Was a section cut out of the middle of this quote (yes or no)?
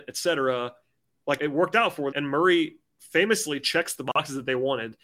yes